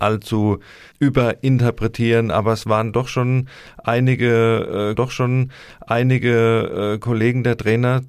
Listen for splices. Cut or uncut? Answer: cut